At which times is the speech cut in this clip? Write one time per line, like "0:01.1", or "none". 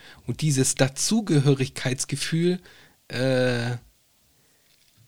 none

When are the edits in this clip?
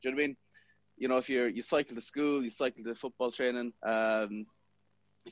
0:03.8

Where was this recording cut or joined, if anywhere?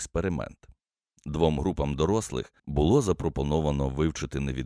0:02.6

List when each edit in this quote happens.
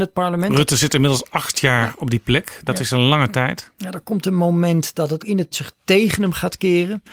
0:05.2
0:05.5

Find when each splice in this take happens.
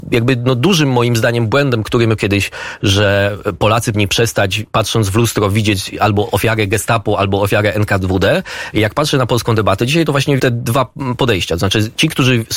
0:02.2
0:03.9
0:10.4

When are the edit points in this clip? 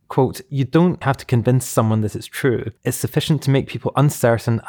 0:01.0
0:02.8

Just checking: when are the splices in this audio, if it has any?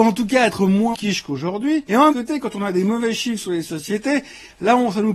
0:00.9
0:02.1

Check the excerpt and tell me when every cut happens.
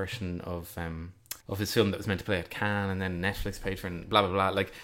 0:01.4

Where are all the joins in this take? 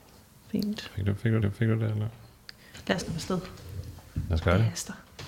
0:01.4
0:03.0

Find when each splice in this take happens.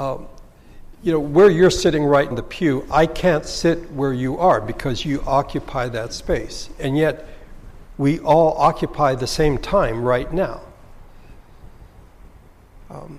0:02.3

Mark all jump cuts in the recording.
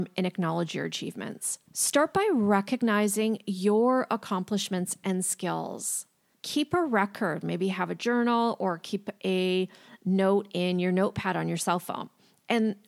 0:01.7
0:06.3

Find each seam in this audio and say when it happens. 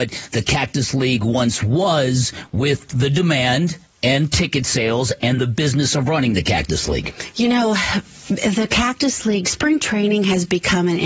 none

